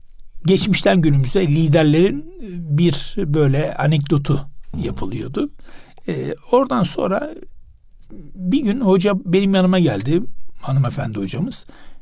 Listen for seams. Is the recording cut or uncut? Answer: uncut